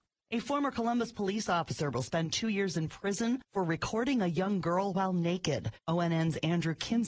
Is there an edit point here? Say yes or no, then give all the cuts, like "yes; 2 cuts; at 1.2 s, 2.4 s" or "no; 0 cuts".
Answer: yes; 1 cut; at 5.7 s